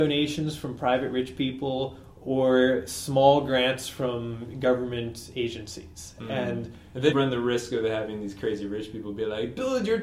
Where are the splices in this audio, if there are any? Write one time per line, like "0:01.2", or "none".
0:07.1